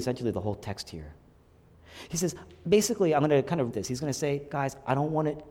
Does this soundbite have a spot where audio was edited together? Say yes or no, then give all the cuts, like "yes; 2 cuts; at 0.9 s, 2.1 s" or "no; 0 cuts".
yes; 1 cut; at 3.7 s